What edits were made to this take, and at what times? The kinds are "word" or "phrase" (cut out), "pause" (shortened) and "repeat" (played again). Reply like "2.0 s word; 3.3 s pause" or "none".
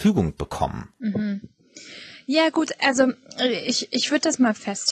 0.9 s pause